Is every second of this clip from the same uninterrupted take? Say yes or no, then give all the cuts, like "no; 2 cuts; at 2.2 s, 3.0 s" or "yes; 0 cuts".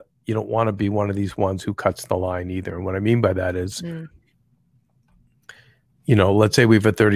yes; 0 cuts